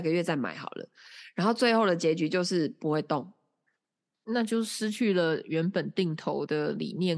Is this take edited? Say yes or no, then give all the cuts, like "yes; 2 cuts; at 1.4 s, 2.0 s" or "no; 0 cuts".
no; 0 cuts